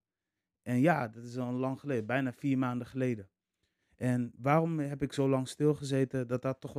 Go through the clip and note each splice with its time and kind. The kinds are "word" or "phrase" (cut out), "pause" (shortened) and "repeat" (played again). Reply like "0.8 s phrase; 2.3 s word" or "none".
none